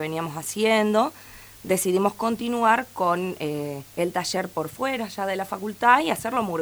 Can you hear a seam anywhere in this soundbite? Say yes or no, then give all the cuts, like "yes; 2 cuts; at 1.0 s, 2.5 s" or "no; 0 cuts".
yes; 1 cut; at 3.9 s